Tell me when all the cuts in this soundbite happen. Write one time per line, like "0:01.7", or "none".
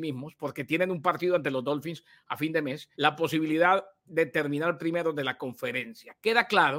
0:02.9

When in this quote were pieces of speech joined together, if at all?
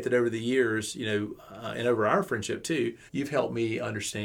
0:03.1

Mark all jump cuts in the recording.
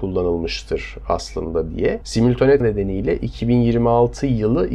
0:02.6

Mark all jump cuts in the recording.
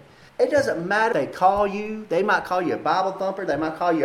0:01.1

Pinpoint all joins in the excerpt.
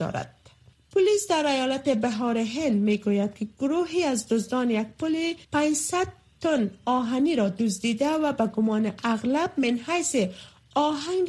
0:05.4

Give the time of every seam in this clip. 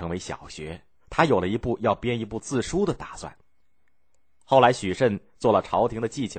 none

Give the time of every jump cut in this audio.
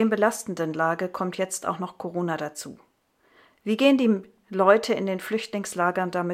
none

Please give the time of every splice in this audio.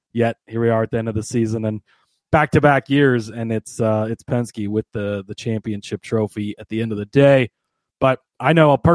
none

